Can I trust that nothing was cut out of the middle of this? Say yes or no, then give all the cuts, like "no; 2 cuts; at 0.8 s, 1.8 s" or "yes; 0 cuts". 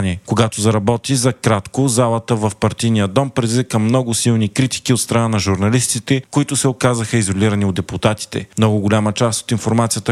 yes; 0 cuts